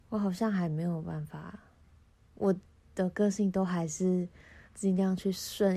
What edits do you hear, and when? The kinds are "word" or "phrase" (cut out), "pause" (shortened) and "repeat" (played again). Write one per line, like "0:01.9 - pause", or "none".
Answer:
0:04.7 - pause